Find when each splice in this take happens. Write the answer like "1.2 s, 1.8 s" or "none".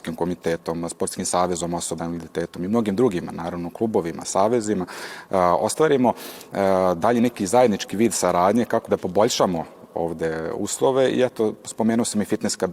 2.0 s, 8.9 s